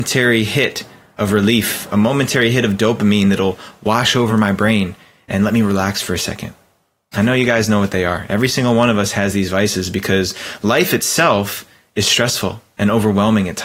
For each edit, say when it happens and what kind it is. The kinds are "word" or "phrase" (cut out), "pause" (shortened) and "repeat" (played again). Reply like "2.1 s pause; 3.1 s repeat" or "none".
none

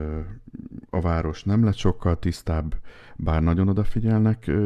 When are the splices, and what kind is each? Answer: none

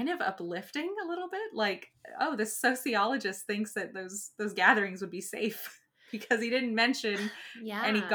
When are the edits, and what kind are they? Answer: none

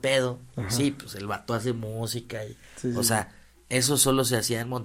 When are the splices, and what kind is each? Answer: none

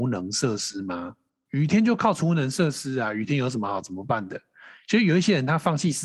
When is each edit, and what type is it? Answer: none

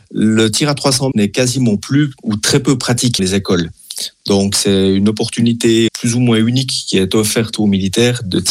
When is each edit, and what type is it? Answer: 1.1 s word; 3.2 s word; 5.9 s word

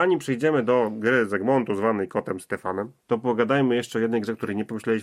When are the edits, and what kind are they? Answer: 3.0 s pause

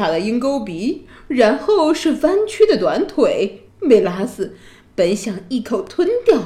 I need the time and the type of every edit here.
3.7 s pause

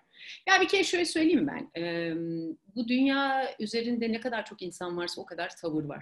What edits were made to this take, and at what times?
none

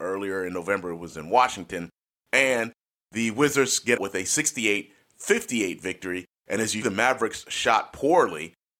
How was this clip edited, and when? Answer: 4.0 s word; 6.8 s word

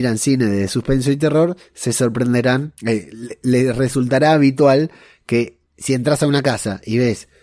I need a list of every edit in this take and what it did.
2.8 s pause; 5.7 s pause

